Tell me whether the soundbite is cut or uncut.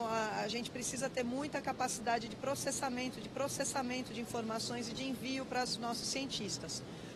cut